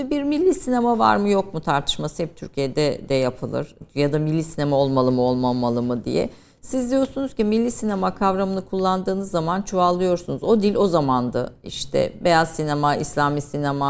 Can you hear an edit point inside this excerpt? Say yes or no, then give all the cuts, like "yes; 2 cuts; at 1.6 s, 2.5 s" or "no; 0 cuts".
no; 0 cuts